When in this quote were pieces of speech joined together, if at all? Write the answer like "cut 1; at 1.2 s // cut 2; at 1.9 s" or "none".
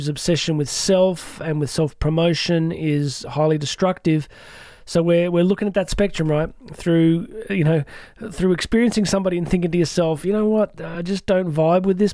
none